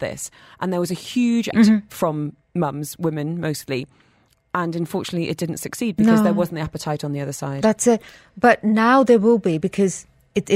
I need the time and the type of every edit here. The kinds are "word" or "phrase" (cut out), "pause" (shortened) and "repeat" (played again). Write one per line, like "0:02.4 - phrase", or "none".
0:01.5 - word